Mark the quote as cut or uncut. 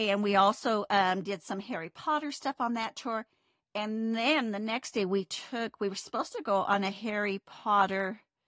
uncut